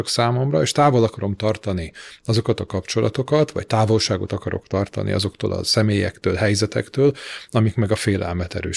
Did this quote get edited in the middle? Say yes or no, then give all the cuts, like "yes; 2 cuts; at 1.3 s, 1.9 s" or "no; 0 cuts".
no; 0 cuts